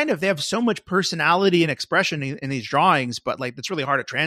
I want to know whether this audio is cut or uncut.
uncut